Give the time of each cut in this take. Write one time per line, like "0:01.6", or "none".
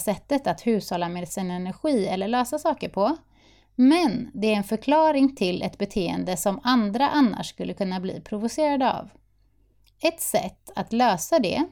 none